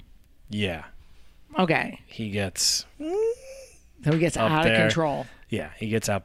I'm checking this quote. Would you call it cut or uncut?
uncut